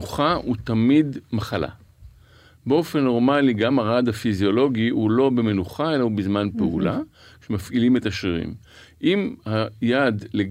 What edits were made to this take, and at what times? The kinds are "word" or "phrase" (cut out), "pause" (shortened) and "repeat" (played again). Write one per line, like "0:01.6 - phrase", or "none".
none